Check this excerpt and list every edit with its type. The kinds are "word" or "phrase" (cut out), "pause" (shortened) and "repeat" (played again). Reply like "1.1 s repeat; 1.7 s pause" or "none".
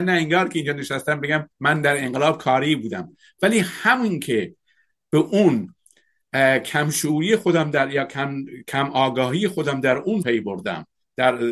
1.5 s pause; 10.2 s word